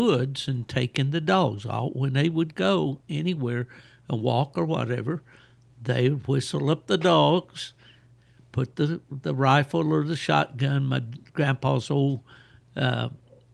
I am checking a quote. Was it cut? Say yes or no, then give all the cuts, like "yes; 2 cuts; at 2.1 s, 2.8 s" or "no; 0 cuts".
no; 0 cuts